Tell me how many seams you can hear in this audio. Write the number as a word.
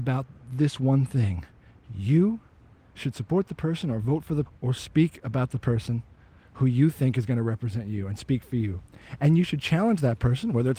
one